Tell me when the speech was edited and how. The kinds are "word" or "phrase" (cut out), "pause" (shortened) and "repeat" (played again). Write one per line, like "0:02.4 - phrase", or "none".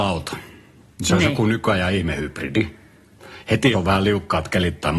0:03.7 - word